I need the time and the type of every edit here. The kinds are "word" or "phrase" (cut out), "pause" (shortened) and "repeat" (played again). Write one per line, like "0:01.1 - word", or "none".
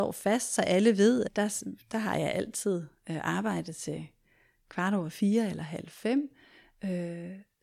none